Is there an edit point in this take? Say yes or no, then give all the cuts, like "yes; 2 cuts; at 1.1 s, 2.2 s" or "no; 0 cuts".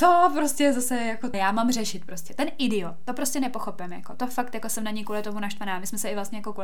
yes; 1 cut; at 1.3 s